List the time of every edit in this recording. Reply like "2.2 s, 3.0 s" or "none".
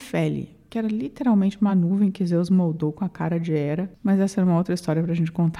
none